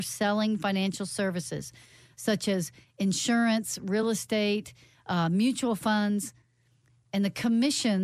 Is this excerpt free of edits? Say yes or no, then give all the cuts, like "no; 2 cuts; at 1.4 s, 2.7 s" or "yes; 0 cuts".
yes; 0 cuts